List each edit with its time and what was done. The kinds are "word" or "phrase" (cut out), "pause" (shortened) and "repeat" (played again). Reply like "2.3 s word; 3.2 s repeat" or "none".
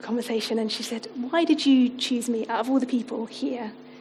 none